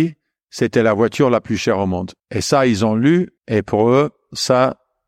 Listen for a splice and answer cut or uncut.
cut